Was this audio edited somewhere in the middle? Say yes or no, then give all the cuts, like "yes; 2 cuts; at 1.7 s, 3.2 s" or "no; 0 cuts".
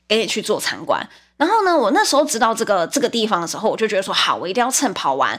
no; 0 cuts